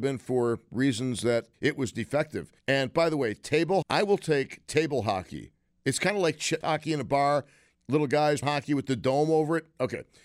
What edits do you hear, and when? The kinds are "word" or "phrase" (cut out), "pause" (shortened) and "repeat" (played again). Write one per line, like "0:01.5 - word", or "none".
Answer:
0:01.5 - word
0:02.6 - pause
0:03.8 - word
0:06.6 - phrase
0:08.4 - word